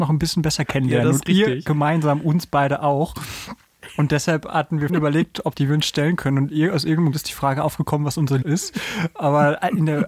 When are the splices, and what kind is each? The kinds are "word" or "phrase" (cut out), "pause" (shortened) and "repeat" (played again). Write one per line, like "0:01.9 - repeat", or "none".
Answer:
0:04.9 - word
0:05.5 - phrase
0:07.1 - word
0:08.4 - word